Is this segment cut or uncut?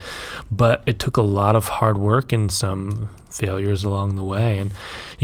uncut